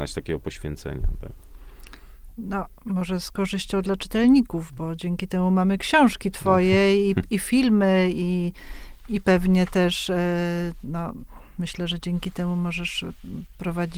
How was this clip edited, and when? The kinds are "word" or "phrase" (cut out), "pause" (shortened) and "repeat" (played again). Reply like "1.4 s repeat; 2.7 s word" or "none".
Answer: none